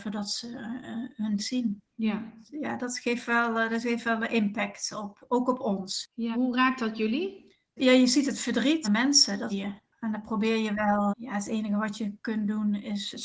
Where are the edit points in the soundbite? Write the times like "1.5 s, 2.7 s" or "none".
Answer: 1.4 s, 6.3 s, 8.8 s, 9.5 s, 11.1 s